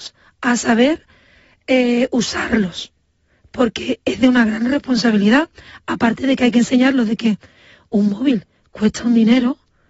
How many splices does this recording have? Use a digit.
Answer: 0